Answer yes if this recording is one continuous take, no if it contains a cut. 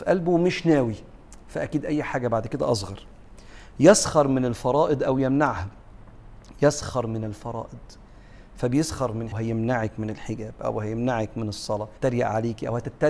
no